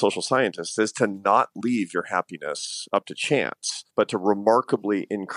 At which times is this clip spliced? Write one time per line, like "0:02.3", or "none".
0:03.9